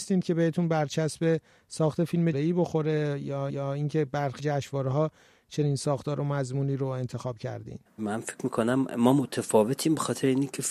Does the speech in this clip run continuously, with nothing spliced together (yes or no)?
no